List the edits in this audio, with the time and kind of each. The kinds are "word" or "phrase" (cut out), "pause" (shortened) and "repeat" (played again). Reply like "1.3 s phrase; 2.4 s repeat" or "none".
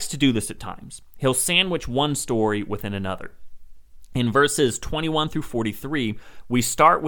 none